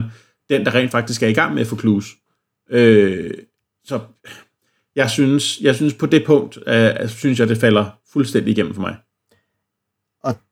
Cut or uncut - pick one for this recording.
uncut